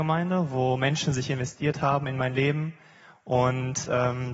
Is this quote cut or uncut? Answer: uncut